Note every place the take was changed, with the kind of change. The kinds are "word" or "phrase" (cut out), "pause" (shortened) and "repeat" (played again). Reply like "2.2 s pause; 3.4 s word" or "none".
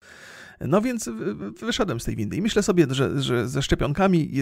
none